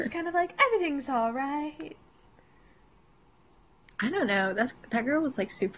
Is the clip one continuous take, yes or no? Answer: yes